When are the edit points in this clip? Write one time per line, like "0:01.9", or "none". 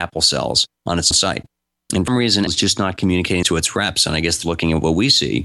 0:01.1
0:02.1
0:02.5
0:03.4
0:04.4